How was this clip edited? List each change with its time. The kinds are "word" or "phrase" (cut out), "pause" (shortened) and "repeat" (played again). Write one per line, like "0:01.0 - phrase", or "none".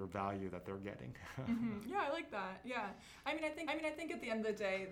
0:03.7 - repeat

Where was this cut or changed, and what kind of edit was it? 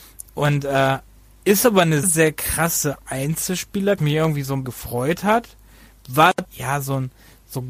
0:02.0 - word
0:04.0 - word
0:04.6 - word
0:06.4 - word

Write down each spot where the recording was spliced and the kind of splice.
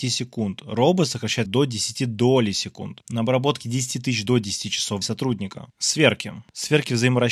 0:01.5 - word
0:04.3 - phrase
0:05.0 - word

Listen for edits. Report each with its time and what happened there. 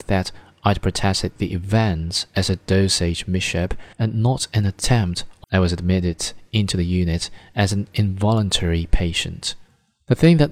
0:03.9 - pause
0:05.4 - phrase

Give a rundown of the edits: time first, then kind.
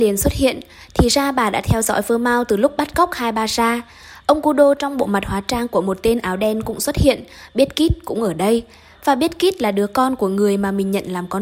none

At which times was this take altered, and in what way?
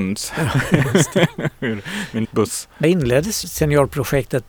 0:02.2 - word
0:02.8 - word
0:03.4 - word

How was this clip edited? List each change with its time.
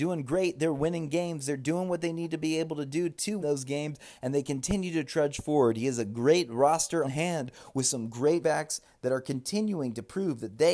0:03.4 - word
0:07.0 - word
0:08.4 - word

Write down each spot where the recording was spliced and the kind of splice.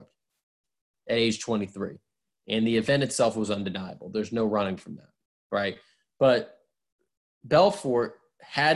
none

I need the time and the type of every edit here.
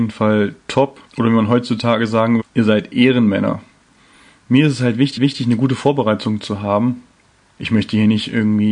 0:01.1 - pause
0:02.4 - word
0:05.2 - repeat
0:07.6 - word

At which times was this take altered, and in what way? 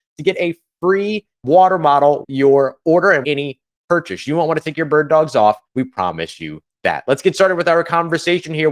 0:01.3 - pause
0:02.2 - word
0:03.2 - word
0:05.6 - pause

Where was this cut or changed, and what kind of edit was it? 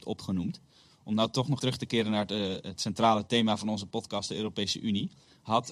0:01.6 - word

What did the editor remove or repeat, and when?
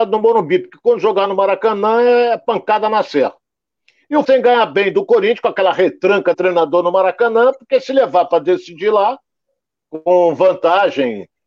0:04.2 - word
0:06.3 - word

